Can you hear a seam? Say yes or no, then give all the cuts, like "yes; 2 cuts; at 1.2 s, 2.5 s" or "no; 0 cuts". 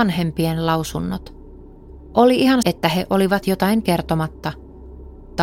yes; 2 cuts; at 2.6 s, 3.4 s